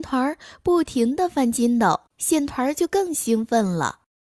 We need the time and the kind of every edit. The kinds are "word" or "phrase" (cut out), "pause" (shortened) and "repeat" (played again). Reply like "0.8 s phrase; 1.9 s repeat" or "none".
2.1 s pause